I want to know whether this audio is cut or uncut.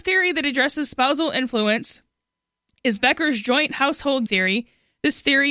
cut